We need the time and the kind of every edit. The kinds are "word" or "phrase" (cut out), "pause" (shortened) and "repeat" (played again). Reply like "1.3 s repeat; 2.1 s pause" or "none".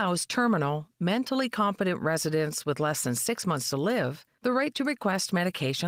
4.3 s pause